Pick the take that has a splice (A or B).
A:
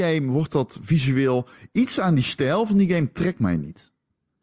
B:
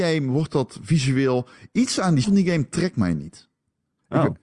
B